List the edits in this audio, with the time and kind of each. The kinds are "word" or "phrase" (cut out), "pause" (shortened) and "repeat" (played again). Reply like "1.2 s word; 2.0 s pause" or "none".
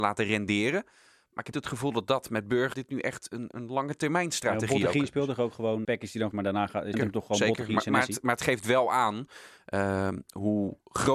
1.5 s word; 2.7 s word; 3.5 s word; 5.8 s word; 6.3 s word; 6.9 s word

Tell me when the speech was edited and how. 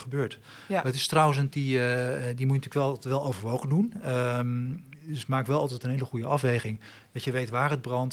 1.5 s word

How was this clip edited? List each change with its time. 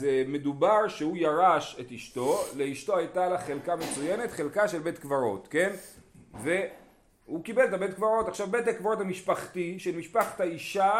none

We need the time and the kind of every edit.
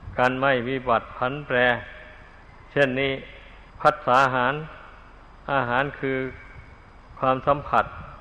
2.4 s pause; 3.7 s pause

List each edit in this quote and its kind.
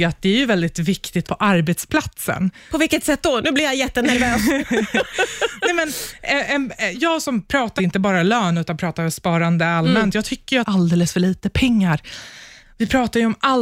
1.2 s phrase; 6.9 s word; 7.8 s phrase; 10.6 s phrase

